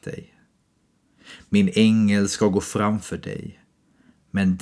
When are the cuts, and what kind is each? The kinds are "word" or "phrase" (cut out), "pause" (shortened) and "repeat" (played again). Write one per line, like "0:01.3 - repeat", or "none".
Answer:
none